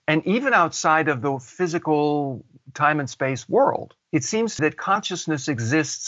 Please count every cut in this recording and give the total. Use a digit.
2